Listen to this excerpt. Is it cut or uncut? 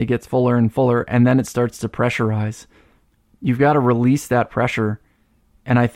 uncut